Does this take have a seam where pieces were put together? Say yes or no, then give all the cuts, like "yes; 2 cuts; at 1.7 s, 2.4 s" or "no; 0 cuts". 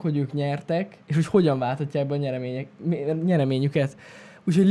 yes; 1 cut; at 1.0 s